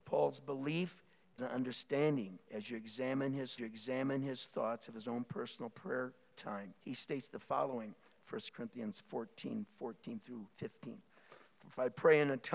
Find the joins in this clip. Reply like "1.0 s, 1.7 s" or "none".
1.4 s, 2.4 s, 3.6 s, 6.8 s, 10.5 s

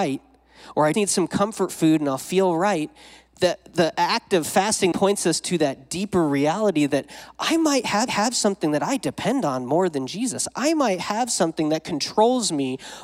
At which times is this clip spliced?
0.9 s, 4.9 s, 8.1 s

